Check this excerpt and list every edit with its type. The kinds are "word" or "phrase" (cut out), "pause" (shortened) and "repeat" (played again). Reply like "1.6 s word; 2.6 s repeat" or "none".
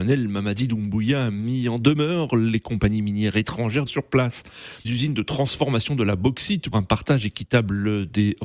3.9 s word; 4.8 s word; 6.7 s word